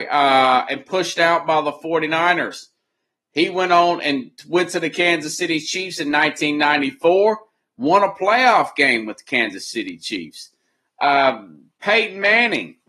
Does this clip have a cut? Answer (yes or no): no